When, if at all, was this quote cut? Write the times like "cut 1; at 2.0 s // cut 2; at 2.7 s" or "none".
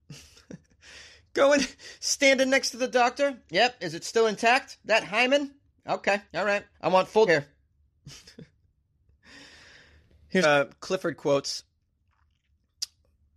cut 1; at 6.3 s // cut 2; at 6.7 s // cut 3; at 7.3 s // cut 4; at 10.4 s

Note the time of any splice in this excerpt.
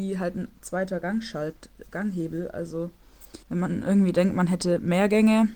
cut 1; at 3.4 s

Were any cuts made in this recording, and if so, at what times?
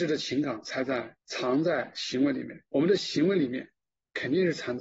cut 1; at 1.2 s // cut 2; at 2.7 s

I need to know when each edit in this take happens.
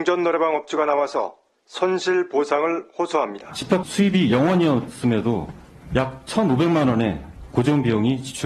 cut 1; at 3.8 s

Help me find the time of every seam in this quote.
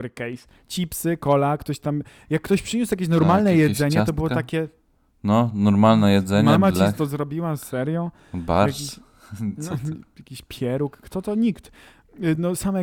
none

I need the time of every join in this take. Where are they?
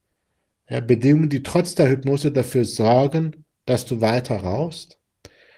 none

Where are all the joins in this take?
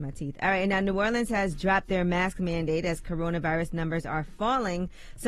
none

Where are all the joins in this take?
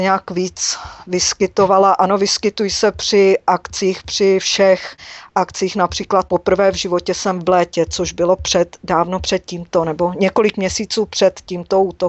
none

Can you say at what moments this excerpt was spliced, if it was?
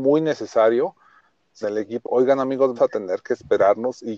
cut 1; at 1.6 s // cut 2; at 2.0 s // cut 3; at 2.8 s

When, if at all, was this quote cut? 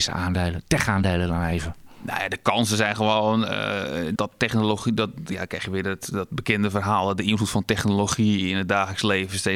cut 1; at 4.2 s

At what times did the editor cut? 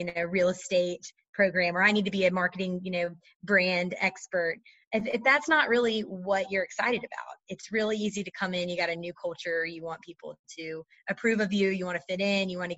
none

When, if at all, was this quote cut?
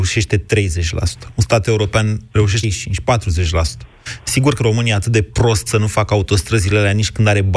cut 1; at 2.6 s // cut 2; at 4.6 s // cut 3; at 5.7 s

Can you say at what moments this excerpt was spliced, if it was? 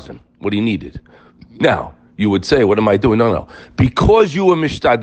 none

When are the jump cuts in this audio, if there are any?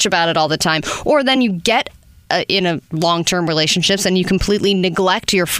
none

